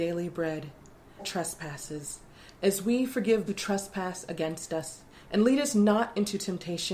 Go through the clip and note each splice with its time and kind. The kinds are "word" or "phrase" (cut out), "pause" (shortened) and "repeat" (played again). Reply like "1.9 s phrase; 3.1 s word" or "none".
1.2 s phrase; 3.5 s word; 5.1 s pause